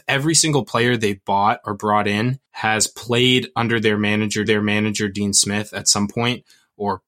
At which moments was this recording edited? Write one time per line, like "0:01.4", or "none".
0:02.5
0:04.5